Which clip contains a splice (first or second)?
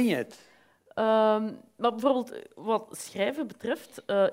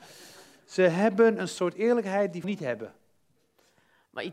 second